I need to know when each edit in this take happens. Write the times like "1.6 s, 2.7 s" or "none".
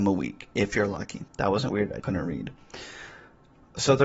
1.3 s, 1.7 s, 2.0 s